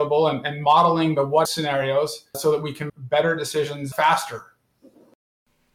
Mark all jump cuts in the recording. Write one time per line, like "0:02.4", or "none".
0:01.4
0:02.3
0:02.9
0:03.9